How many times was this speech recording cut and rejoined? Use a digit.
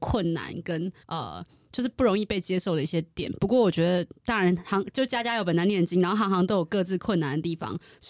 1